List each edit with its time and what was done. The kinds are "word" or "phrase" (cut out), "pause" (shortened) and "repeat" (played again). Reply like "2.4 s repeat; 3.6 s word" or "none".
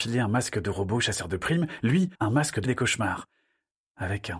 2.1 s pause; 2.7 s word